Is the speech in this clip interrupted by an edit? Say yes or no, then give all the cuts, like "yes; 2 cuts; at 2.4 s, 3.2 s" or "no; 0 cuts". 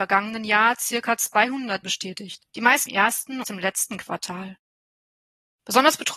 yes; 4 cuts; at 1.8 s, 2.5 s, 2.9 s, 3.4 s